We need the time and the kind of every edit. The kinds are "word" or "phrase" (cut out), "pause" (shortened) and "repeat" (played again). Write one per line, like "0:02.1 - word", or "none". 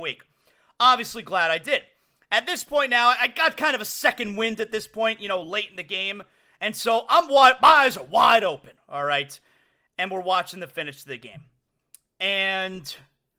none